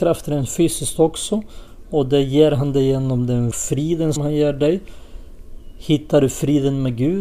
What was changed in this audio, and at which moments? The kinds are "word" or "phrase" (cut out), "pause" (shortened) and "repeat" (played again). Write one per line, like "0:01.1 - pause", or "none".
0:03.5 - phrase
0:04.2 - word